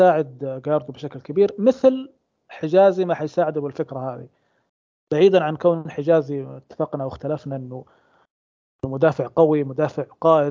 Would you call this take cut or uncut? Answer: uncut